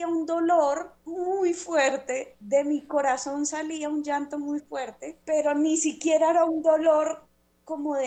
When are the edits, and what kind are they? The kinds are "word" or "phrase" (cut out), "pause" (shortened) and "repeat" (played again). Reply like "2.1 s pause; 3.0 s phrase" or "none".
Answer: 1.0 s pause; 5.2 s pause